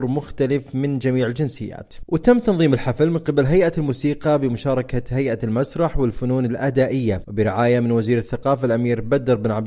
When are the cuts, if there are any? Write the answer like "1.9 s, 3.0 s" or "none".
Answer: none